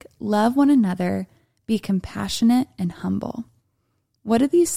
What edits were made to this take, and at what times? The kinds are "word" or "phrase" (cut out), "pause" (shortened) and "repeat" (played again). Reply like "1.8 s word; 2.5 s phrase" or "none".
none